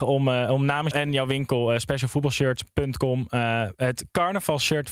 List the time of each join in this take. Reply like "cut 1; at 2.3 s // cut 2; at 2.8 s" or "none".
cut 1; at 0.9 s